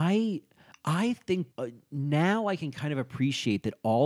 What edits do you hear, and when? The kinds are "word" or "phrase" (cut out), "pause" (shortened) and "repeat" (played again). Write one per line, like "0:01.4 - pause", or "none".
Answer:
0:01.5 - pause